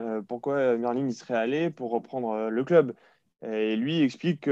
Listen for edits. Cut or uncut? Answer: uncut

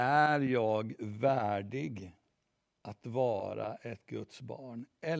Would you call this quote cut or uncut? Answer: uncut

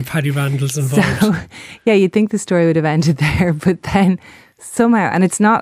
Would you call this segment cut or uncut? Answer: uncut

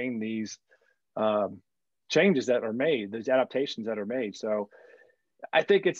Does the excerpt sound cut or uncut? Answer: uncut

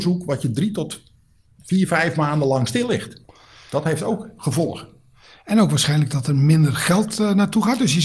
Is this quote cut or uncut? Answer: uncut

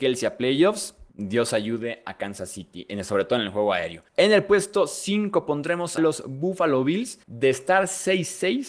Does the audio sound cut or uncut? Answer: cut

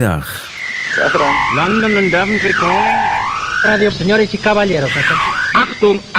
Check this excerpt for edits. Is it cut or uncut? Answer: cut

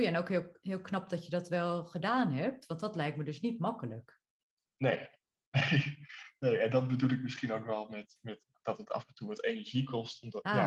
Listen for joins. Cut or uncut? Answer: uncut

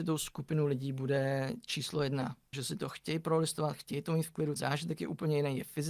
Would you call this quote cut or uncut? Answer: cut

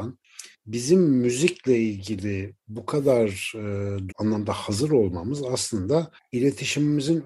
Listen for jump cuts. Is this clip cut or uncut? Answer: cut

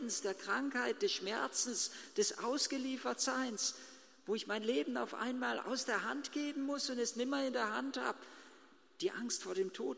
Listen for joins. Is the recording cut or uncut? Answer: uncut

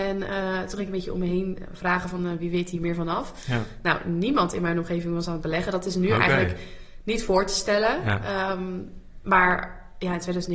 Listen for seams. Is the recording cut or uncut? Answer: uncut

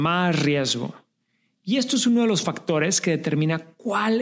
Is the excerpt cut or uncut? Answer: uncut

